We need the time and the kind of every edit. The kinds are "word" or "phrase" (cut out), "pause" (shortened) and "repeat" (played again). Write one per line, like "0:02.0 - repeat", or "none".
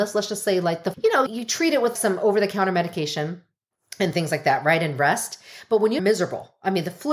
0:00.9 - word
0:01.3 - word
0:02.0 - word
0:06.0 - phrase